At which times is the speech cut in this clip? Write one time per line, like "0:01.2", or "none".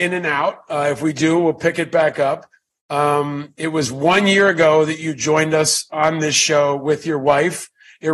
none